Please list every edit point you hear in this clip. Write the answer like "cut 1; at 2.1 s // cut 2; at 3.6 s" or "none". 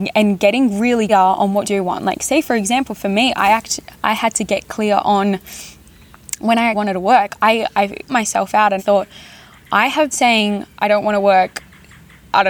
cut 1; at 1.1 s // cut 2; at 1.6 s // cut 3; at 6.7 s // cut 4; at 8.1 s // cut 5; at 8.8 s // cut 6; at 10.1 s